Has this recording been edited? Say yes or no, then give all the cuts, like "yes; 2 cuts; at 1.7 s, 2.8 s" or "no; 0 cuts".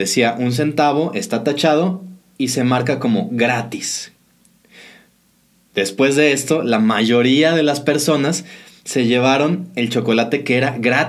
no; 0 cuts